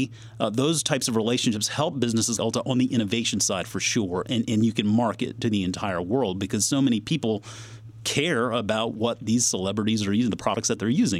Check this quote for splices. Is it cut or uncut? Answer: cut